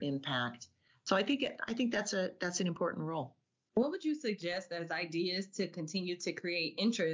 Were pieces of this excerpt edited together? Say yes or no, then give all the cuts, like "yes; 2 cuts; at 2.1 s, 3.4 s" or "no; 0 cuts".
no; 0 cuts